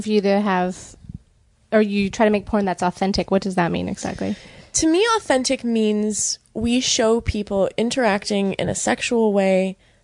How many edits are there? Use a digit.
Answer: 0